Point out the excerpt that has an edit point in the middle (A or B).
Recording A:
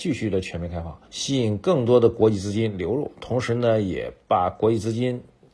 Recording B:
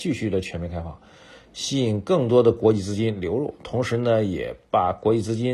A